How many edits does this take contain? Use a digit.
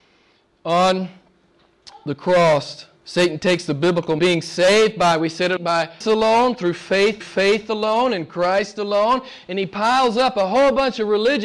5